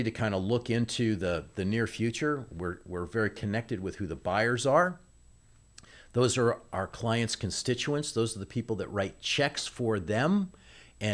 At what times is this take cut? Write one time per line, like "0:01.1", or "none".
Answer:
none